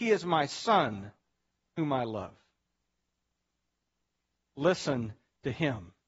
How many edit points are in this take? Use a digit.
0